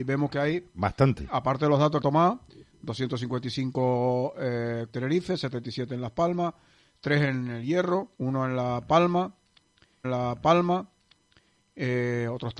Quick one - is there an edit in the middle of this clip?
yes; 4 cuts; at 2.0 s, 4.9 s, 8.1 s, 10.0 s

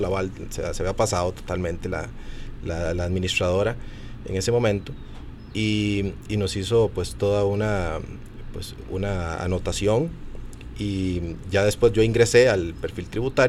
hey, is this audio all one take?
yes; 0 cuts

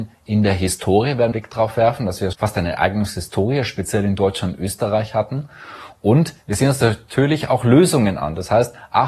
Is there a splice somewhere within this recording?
yes; 2 cuts; at 1.3 s, 2.3 s

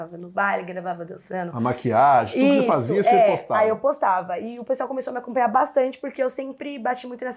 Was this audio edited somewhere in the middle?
no; 0 cuts

